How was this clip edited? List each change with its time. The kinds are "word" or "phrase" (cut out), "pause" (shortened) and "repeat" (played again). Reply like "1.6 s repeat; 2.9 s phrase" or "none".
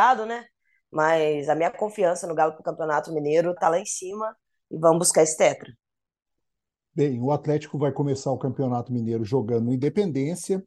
3.6 s word